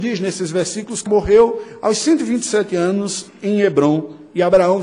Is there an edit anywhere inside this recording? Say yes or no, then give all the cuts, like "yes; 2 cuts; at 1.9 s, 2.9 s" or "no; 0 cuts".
yes; 1 cut; at 1.1 s